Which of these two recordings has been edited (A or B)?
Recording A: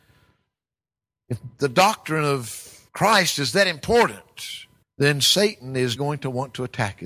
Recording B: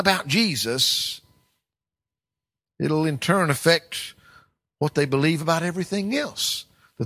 A